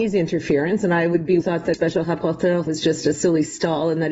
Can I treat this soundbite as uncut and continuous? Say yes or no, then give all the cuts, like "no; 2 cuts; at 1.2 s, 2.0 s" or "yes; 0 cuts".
no; 3 cuts; at 1.4 s, 1.7 s, 2.7 s